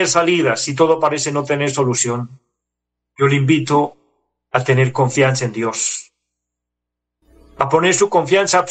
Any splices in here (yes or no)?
no